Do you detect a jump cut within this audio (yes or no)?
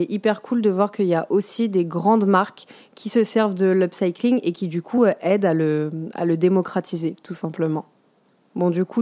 no